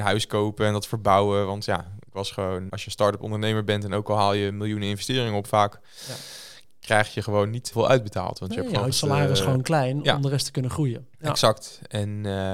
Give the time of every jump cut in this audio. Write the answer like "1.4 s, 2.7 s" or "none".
2.7 s, 7.7 s, 8.9 s